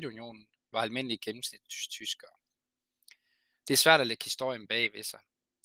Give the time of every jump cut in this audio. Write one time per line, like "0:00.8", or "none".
none